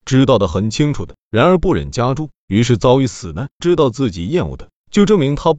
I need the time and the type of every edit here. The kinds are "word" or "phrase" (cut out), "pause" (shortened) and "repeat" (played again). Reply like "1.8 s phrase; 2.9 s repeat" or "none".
3.6 s phrase